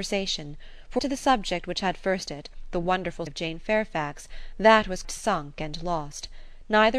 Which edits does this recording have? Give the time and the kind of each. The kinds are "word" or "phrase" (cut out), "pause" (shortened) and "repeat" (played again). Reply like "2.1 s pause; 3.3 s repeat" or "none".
1.0 s word; 2.3 s word; 3.3 s word; 5.0 s word